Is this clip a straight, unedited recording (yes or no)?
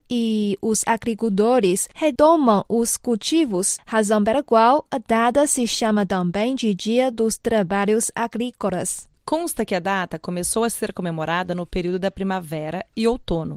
yes